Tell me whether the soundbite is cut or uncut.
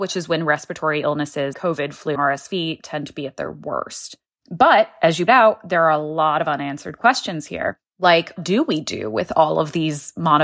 cut